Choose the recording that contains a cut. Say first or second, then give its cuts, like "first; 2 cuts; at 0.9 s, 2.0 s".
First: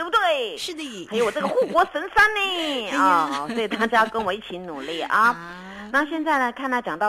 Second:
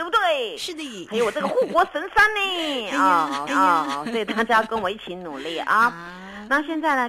second; 1 cut; at 3.5 s